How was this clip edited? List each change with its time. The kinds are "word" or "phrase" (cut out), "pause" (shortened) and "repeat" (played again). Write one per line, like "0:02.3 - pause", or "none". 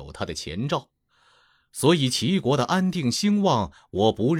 none